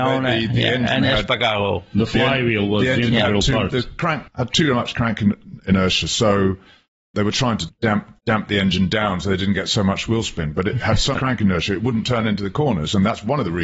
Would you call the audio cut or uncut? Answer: cut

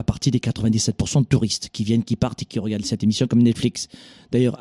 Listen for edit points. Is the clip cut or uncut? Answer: uncut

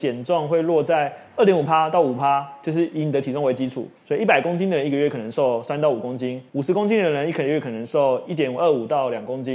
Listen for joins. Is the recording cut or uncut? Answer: cut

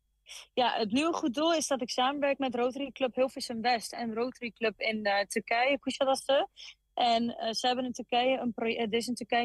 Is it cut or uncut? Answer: uncut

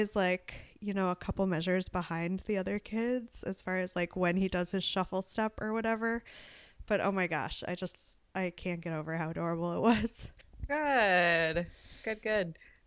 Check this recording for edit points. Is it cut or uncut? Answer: uncut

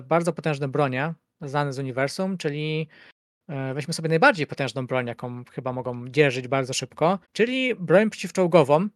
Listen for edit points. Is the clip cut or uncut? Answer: cut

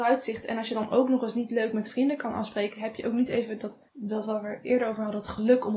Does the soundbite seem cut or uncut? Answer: cut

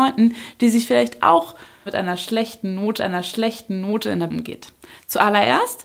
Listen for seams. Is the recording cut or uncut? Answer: cut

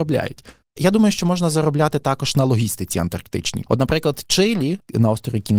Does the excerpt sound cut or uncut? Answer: uncut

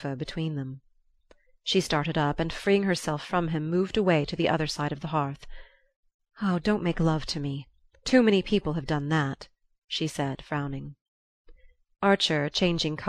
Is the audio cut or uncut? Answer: uncut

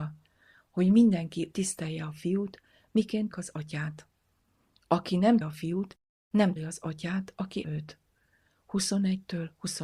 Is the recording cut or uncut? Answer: cut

